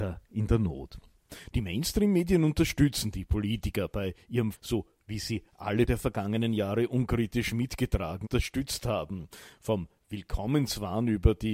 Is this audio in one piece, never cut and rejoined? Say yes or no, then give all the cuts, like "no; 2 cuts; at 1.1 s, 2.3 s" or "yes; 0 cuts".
no; 3 cuts; at 4.5 s, 5.9 s, 8.2 s